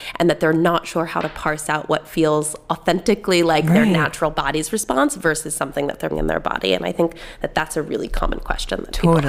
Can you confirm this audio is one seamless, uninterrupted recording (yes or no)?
no